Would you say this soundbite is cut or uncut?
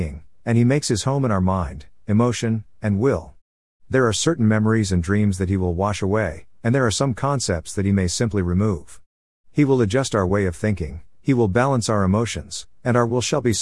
uncut